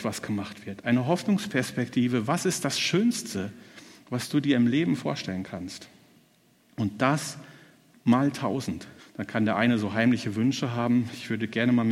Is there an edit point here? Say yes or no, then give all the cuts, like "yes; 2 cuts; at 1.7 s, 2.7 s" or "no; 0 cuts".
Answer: yes; 1 cut; at 9.0 s